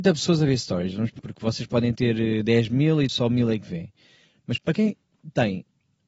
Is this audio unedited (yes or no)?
no